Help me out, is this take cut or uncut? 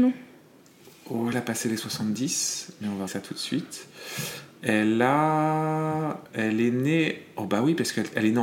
cut